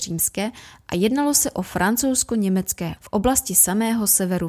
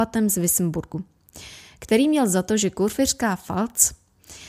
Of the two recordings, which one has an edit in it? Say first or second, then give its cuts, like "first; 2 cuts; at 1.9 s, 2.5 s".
first; 1 cut; at 3.0 s